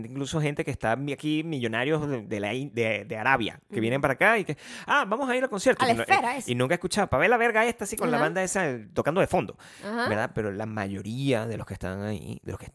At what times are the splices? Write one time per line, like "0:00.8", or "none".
none